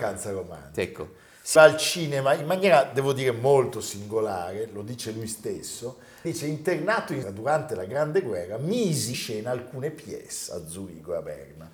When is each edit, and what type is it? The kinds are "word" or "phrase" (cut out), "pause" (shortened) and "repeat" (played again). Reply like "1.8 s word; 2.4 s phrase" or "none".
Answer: 1.6 s word; 6.2 s word; 7.2 s word; 9.1 s word